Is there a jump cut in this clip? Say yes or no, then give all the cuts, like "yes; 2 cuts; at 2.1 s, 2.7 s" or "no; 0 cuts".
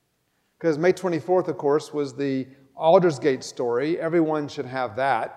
no; 0 cuts